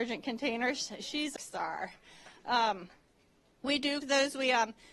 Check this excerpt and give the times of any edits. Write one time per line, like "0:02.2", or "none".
0:01.4
0:03.6
0:04.0